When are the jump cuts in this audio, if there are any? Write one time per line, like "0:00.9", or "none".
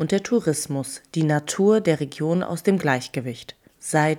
none